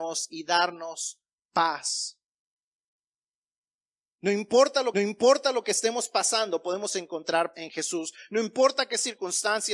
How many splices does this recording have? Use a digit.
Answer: 2